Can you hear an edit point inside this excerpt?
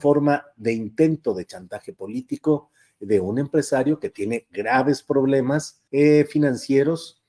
yes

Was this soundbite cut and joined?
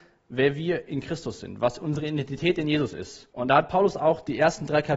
yes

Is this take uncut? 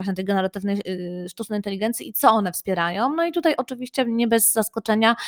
yes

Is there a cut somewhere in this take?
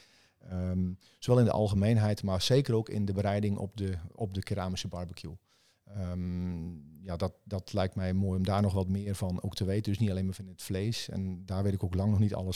no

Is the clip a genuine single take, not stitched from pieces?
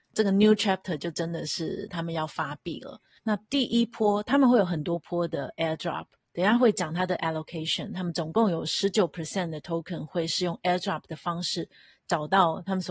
no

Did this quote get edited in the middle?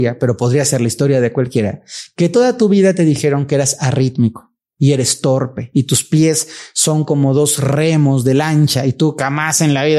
no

